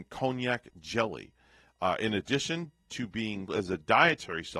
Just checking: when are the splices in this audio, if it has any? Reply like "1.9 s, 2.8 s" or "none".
3.5 s

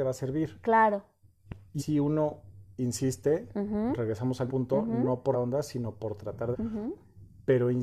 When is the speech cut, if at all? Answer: 1.8 s, 4.5 s, 5.3 s, 6.5 s

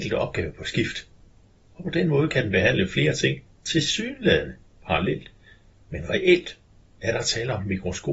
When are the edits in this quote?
none

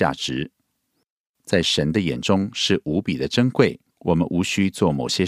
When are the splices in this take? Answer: 3.9 s

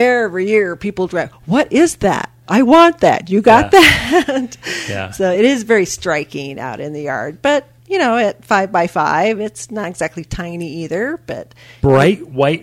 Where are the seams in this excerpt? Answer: none

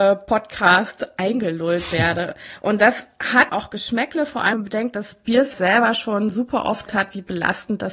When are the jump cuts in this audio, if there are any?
3.5 s, 4.5 s, 5.5 s, 6.9 s

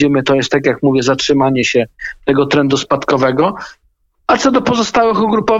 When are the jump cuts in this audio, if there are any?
none

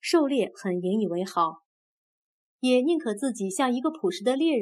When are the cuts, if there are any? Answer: none

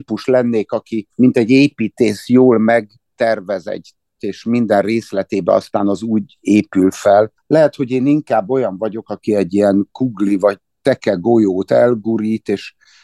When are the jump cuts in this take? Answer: 1.1 s, 4.2 s, 7.4 s

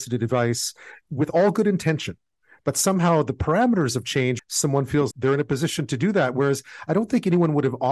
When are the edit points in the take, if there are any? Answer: 4.4 s, 5.1 s

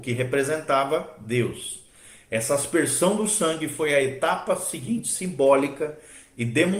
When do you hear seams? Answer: none

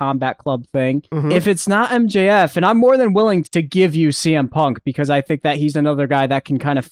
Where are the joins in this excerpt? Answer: 3.4 s

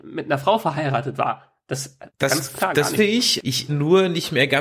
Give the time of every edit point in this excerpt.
2.1 s, 3.0 s, 3.7 s

